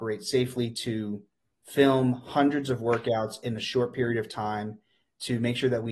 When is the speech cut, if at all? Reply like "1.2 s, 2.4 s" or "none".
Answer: none